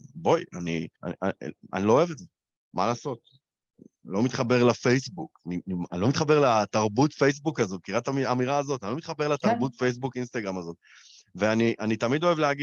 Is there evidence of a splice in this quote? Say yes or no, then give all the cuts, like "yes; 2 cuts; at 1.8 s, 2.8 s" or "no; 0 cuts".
yes; 1 cut; at 0.9 s